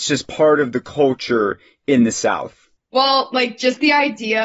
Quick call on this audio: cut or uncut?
uncut